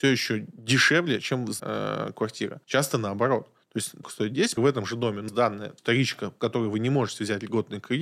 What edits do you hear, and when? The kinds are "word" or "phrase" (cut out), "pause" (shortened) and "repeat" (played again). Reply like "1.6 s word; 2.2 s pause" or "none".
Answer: 1.6 s word; 2.6 s pause; 4.0 s phrase; 4.6 s phrase; 5.3 s word; 5.8 s word